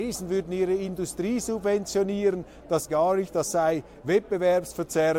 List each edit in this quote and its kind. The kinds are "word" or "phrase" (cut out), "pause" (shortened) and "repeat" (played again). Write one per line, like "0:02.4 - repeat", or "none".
0:02.9 - word